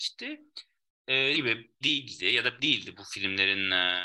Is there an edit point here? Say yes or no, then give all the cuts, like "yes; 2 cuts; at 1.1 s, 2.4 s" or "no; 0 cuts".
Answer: yes; 3 cuts; at 1.3 s, 1.8 s, 2.6 s